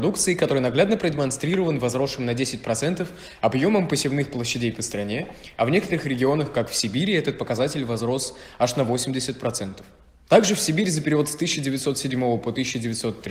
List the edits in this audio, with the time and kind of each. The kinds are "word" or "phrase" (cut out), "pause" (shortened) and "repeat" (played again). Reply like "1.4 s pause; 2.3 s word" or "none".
none